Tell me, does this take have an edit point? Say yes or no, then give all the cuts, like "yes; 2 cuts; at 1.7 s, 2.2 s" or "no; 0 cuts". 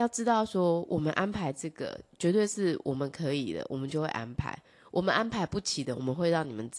no; 0 cuts